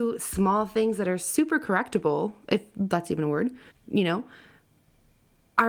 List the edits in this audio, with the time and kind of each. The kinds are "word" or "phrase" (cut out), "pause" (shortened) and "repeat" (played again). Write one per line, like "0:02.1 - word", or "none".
0:03.7 - pause